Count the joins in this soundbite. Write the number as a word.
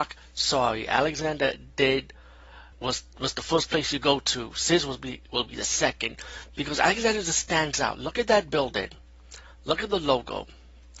one